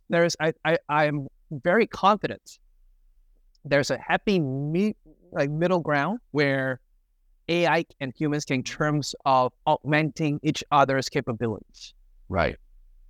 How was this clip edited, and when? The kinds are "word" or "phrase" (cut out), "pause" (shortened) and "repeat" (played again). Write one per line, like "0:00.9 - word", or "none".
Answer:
0:06.3 - pause
0:08.6 - phrase
0:09.6 - pause